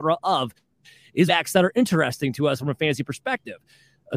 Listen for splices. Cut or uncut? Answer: cut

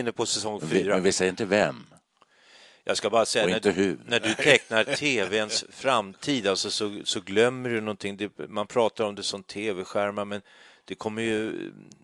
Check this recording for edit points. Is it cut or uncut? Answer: uncut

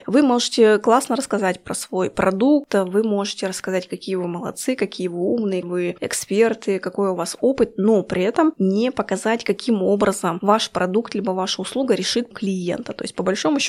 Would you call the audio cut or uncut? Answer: cut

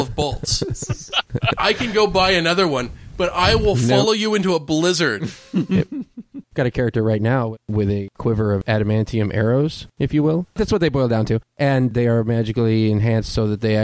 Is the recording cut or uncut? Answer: uncut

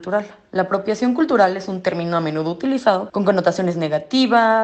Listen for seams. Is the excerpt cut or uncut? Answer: cut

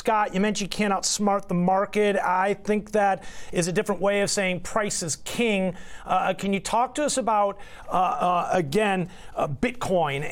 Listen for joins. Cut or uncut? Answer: uncut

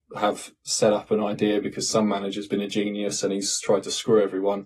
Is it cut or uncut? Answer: uncut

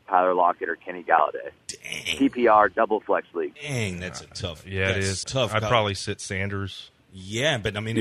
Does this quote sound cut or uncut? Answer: cut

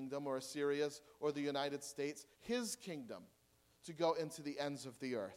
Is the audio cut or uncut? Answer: cut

